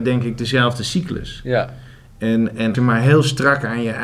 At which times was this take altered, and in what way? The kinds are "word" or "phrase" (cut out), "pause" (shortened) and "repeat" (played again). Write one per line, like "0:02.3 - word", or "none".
0:02.7 - word